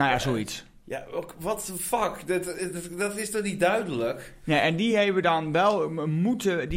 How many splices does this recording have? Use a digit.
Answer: 0